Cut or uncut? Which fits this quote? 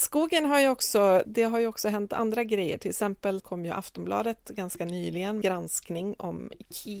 cut